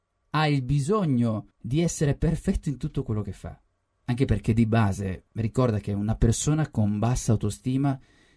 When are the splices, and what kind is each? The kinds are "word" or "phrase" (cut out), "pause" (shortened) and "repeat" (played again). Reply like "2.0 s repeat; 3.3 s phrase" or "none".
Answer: 1.5 s pause; 3.9 s pause; 5.3 s pause

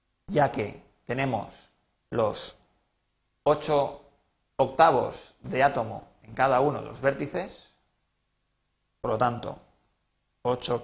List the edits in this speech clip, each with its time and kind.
none

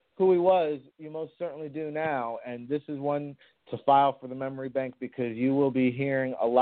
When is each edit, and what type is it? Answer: none

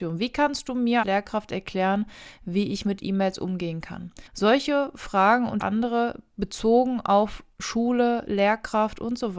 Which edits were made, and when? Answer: 1.0 s word; 4.3 s pause; 5.6 s word

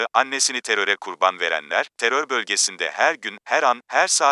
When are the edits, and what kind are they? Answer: none

